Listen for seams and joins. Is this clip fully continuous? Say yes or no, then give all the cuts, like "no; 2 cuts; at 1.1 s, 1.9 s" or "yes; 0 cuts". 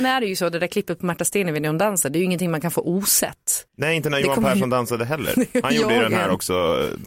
no; 1 cut; at 3.7 s